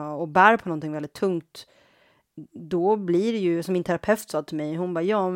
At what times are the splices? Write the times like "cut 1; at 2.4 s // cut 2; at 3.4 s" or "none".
none